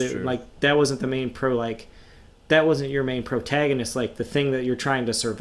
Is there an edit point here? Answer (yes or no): no